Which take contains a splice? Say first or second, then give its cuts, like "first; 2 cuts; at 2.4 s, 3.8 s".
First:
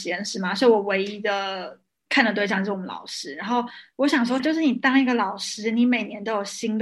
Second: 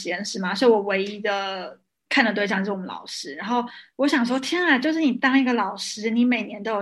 first; 1 cut; at 4.4 s